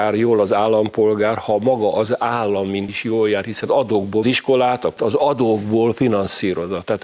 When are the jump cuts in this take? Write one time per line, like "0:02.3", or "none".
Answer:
0:02.9
0:03.7
0:04.2
0:05.0